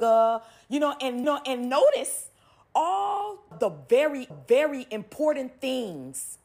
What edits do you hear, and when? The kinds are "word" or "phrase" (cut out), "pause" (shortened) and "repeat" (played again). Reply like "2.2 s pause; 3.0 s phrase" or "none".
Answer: 1.2 s repeat; 3.5 s word; 4.3 s repeat

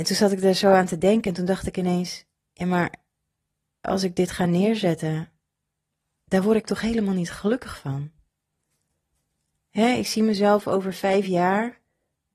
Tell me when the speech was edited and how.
none

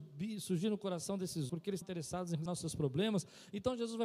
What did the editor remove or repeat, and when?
1.5 s word; 1.8 s word; 2.5 s word

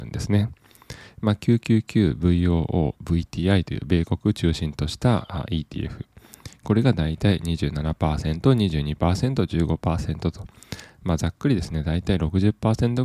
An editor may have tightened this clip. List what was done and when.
none

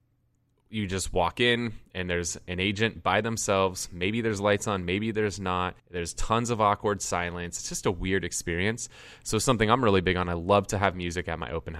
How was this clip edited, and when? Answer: 5.8 s pause

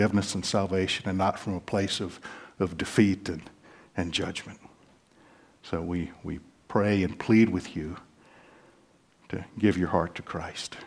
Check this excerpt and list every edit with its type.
none

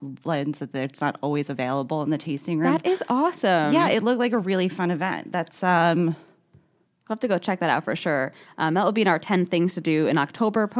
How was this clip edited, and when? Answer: none

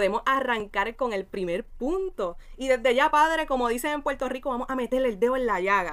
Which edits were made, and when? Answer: none

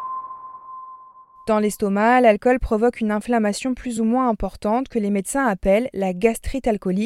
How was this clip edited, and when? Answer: none

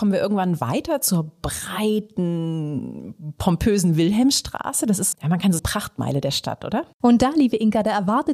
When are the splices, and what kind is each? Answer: 5.1 s word; 5.6 s phrase

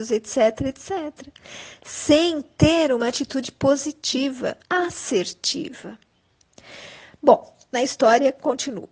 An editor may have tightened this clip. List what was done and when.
4.6 s pause

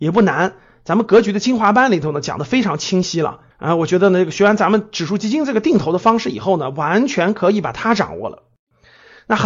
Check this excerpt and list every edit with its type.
3.5 s pause

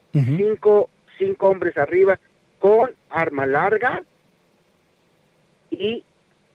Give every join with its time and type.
none

